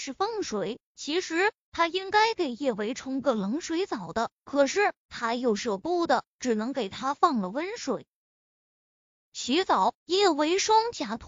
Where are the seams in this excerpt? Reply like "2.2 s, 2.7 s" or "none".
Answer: 10.0 s